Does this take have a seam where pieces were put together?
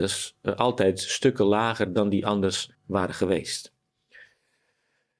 yes; 1 cut; at 2.7 s

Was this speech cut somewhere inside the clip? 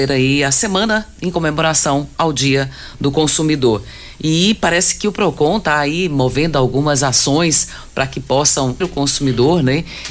yes; 1 cut; at 8.8 s

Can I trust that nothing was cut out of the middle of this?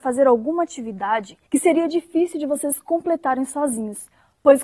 no; 1 cut; at 1.5 s

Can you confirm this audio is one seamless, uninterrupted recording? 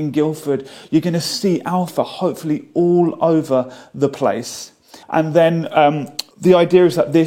no; 2 cuts; at 5.0 s, 6.3 s

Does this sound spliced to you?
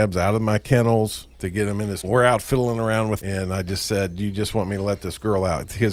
yes; 3 cuts; at 1.3 s, 2.0 s, 3.2 s

